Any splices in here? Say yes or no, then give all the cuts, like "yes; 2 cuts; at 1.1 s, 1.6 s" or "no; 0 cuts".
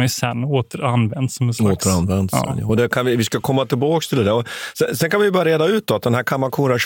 no; 0 cuts